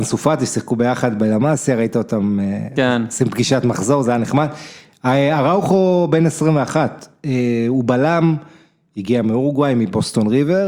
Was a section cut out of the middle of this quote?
no; 0 cuts

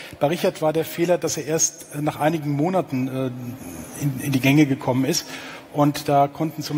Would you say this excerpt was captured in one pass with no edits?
yes; 0 cuts

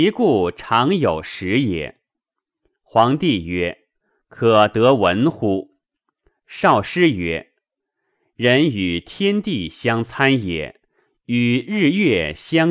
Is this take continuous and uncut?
yes; 0 cuts

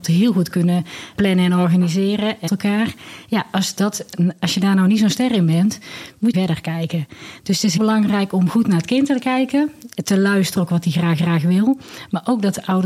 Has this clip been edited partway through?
yes; 5 cuts; at 1.2 s, 2.5 s, 6.3 s, 7.8 s, 11.2 s

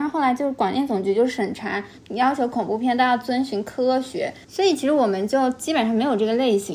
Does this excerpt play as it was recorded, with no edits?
no; 1 cut; at 4.4 s

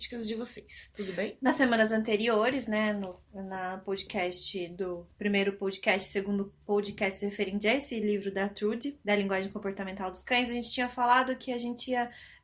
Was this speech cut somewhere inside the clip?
yes; 2 cuts; at 5.1 s, 9.0 s

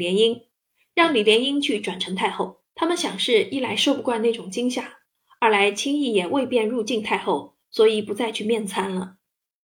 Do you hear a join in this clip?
yes; 1 cut; at 2.7 s

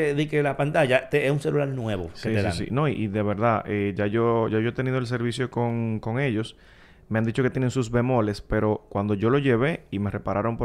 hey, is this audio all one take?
yes; 0 cuts

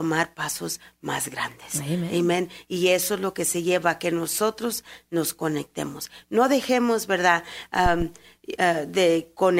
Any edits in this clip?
no; 0 cuts

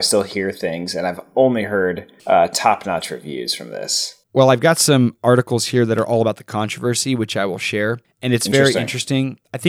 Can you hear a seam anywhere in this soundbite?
yes; 3 cuts; at 2.2 s, 4.2 s, 8.0 s

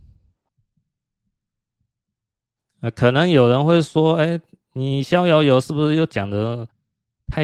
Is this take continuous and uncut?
yes; 0 cuts

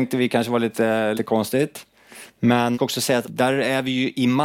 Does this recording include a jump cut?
yes; 3 cuts; at 1.2 s, 2.7 s, 3.2 s

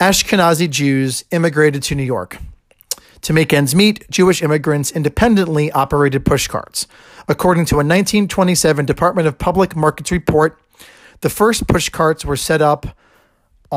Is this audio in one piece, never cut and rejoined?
yes; 0 cuts

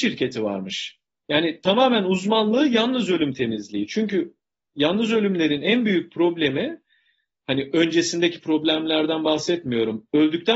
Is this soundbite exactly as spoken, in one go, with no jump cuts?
yes; 0 cuts

